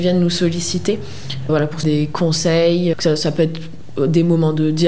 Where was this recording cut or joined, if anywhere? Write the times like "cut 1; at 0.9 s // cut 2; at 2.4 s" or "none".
cut 1; at 1.5 s // cut 2; at 1.8 s // cut 3; at 2.9 s